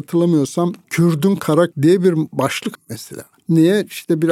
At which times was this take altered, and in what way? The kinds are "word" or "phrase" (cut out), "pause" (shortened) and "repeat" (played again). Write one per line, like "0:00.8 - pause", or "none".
0:01.7 - word
0:02.7 - word